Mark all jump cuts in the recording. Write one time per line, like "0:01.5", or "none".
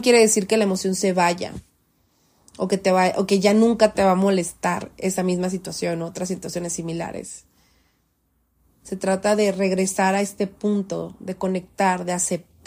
none